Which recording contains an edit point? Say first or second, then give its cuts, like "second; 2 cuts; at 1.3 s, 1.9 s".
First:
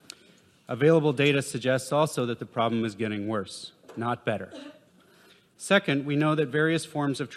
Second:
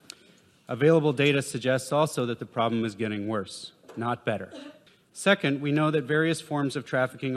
second; 1 cut; at 4.9 s